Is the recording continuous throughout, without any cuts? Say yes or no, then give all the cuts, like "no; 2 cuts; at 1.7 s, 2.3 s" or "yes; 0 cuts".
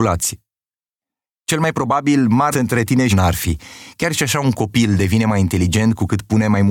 no; 2 cuts; at 2.5 s, 3.1 s